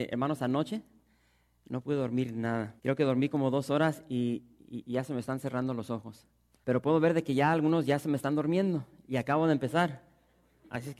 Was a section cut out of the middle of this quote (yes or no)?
yes